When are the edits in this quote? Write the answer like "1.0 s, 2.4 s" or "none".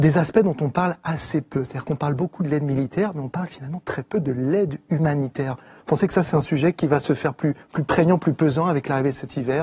7.6 s